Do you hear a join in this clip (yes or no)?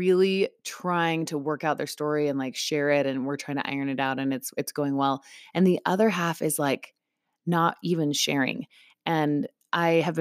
no